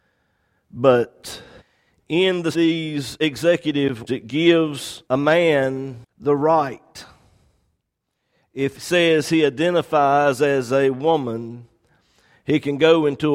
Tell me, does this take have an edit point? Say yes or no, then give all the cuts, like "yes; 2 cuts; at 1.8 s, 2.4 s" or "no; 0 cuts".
yes; 6 cuts; at 1.6 s, 2.5 s, 4.1 s, 5.0 s, 6.1 s, 8.7 s